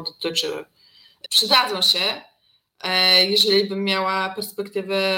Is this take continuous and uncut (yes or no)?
no